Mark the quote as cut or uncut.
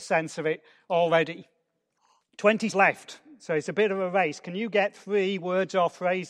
cut